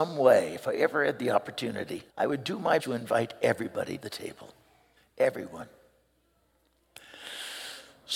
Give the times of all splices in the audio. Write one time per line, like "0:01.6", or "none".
0:02.1
0:02.8
0:04.0
0:05.0